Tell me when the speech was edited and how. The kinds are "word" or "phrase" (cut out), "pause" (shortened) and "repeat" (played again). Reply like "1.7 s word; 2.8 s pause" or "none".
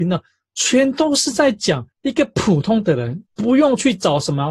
1.9 s pause; 3.3 s pause

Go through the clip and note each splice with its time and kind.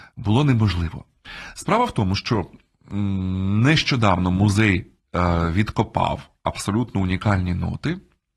none

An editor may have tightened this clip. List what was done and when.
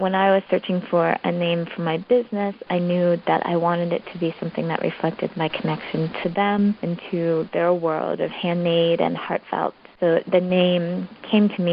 none

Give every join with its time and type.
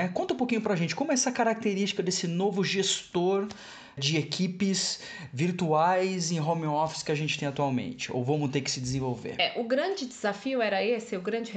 4.0 s word

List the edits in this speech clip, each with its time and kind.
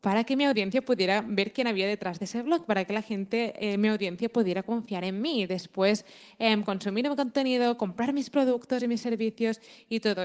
none

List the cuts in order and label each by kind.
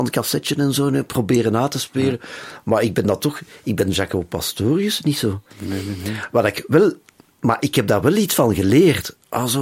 5.5 s pause

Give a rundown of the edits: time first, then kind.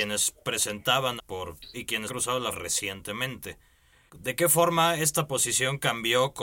1.2 s word; 1.7 s word; 2.1 s word; 2.5 s word

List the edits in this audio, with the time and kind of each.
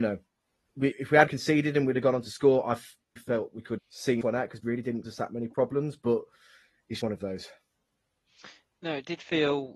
0.9 s word; 1.3 s word; 3.2 s word; 3.8 s word; 4.2 s word; 4.6 s word; 5.0 s word; 7.0 s word

